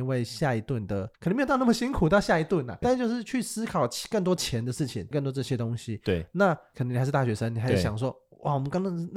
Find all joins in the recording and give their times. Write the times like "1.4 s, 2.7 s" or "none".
1.1 s, 2.8 s, 5.1 s